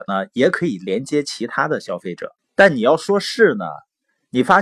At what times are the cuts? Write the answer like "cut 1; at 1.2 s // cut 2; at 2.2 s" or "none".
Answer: cut 1; at 2.4 s